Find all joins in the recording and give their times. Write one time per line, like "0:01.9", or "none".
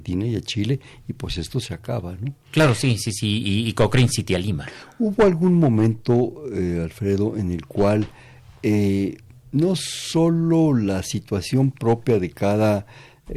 none